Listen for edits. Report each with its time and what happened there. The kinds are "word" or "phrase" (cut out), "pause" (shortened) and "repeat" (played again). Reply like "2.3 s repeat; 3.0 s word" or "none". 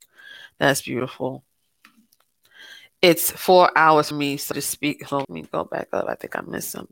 4.1 s word; 4.5 s word; 5.2 s word